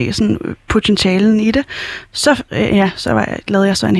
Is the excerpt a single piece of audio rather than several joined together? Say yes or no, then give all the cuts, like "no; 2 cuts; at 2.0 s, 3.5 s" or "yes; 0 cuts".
no; 1 cut; at 2.5 s